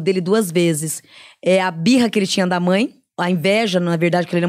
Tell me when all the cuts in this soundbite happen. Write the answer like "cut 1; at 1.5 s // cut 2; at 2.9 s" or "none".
none